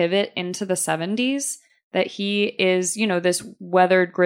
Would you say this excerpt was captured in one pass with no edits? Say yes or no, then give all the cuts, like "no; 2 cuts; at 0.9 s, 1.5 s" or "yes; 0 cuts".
yes; 0 cuts